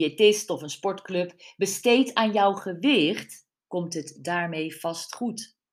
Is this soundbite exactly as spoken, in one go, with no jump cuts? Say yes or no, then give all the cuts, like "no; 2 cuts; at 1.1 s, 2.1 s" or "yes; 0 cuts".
yes; 0 cuts